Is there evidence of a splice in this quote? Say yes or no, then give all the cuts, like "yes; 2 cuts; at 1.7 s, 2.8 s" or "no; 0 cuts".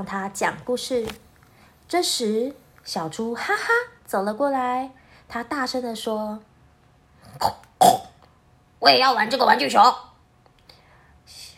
no; 0 cuts